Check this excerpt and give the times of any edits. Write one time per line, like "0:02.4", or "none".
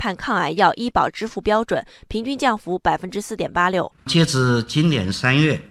none